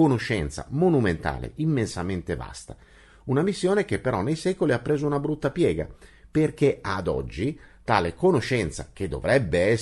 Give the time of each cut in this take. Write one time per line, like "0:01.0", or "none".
none